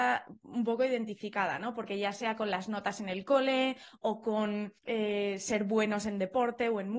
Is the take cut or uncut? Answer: cut